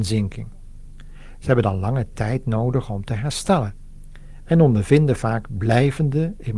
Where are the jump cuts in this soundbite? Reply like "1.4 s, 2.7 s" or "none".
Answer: none